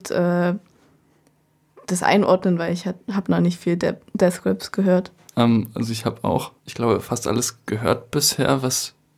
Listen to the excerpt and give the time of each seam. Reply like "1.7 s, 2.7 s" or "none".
6.6 s